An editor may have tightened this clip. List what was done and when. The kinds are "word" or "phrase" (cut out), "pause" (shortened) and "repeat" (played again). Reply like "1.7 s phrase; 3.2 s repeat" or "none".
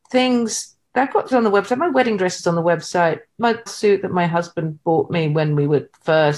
1.3 s word; 3.7 s phrase

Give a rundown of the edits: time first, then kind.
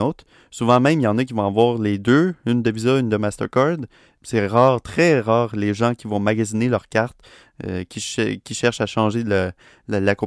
none

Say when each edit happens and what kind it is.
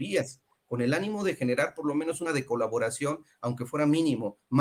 2.3 s word

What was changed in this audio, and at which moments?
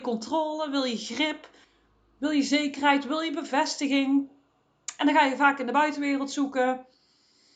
none

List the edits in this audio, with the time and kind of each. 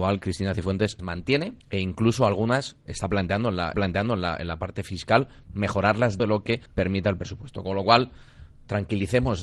1.0 s word; 1.6 s pause; 2.9 s word; 3.7 s repeat; 6.2 s word; 6.7 s pause

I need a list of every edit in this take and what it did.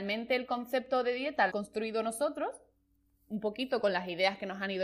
1.5 s word

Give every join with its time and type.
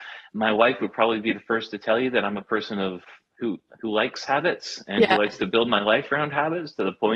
none

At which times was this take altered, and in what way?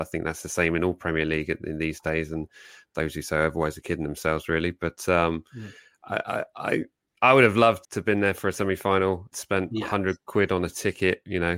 7.8 s word; 9.3 s word

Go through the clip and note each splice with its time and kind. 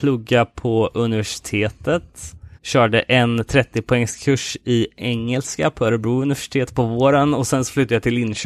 2.5 s pause

